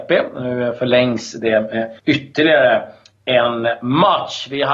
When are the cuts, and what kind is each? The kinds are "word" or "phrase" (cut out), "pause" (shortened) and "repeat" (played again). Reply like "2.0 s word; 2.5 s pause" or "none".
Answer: 2.0 s pause